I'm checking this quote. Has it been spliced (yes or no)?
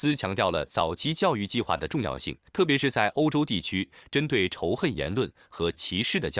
yes